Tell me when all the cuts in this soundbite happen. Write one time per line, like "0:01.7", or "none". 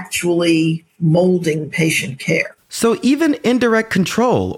0:02.6